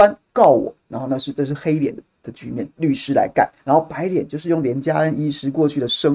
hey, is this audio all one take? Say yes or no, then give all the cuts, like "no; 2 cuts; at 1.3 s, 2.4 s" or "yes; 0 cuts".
no; 1 cut; at 3.6 s